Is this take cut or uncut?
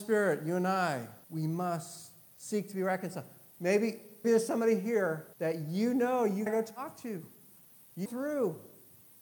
cut